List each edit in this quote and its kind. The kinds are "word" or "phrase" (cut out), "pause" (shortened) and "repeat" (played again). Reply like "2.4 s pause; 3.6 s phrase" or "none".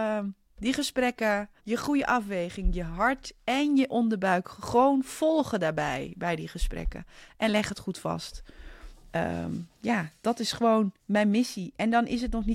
1.6 s pause; 9.7 s pause; 11.0 s pause